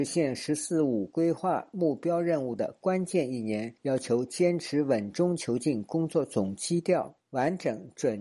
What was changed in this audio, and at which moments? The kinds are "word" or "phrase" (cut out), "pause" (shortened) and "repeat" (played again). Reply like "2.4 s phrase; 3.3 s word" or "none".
3.8 s pause; 7.2 s pause